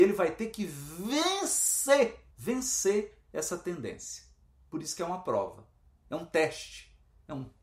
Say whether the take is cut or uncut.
cut